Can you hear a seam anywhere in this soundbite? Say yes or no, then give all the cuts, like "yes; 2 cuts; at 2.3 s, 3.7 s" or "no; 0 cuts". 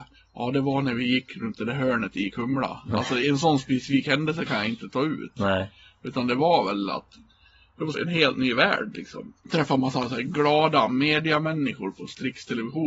yes; 1 cut; at 7.9 s